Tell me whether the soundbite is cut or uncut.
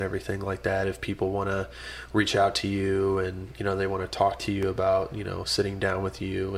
uncut